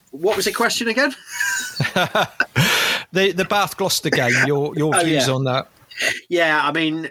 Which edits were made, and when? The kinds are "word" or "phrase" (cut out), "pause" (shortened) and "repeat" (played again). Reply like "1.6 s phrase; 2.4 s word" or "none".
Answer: none